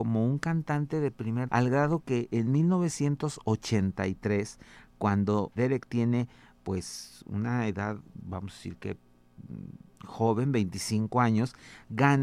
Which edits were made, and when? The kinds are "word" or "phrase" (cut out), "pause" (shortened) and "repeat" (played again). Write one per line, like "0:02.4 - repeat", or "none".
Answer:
0:01.5 - word
0:05.6 - word